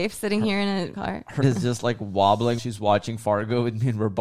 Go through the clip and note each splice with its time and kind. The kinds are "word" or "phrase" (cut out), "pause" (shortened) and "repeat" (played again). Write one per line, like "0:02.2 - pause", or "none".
0:00.9 - word
0:01.4 - word
0:02.6 - word

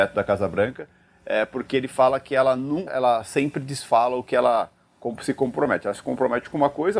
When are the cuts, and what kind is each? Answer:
0:02.9 - word

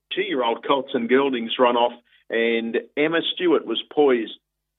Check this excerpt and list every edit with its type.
none

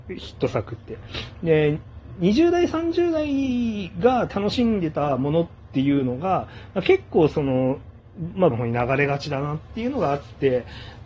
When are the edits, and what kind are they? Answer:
0:08.5 - word

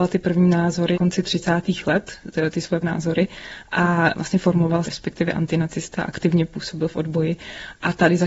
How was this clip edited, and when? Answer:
0:00.9 - word
0:02.8 - word
0:04.8 - phrase

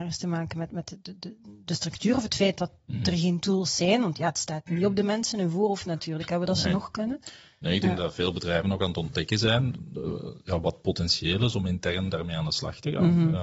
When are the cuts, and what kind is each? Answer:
none

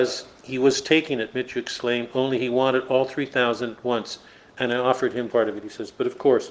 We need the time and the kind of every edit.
0:05.3 - word

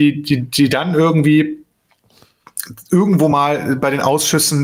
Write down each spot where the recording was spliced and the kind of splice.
none

